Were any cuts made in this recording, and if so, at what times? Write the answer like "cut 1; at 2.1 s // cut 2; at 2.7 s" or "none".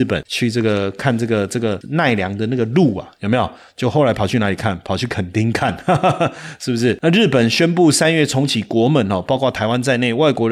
none